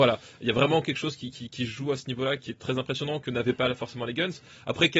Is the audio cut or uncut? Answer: cut